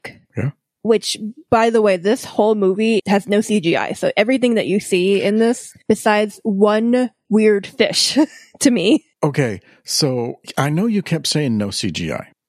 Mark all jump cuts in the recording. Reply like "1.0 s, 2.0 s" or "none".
3.0 s, 7.2 s